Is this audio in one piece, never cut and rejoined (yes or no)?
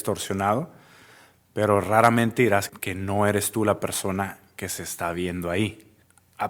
no